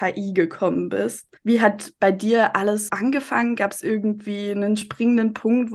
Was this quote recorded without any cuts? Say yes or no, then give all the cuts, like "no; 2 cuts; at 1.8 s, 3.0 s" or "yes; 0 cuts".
no; 2 cuts; at 1.4 s, 2.9 s